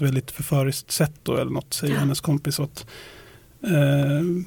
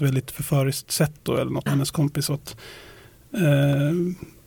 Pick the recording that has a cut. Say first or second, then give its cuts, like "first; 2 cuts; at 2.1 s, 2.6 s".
second; 1 cut; at 1.7 s